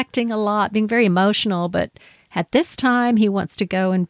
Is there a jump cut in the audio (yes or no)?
no